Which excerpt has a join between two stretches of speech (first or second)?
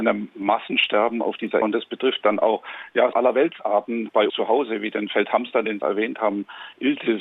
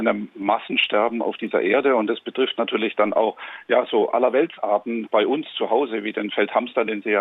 first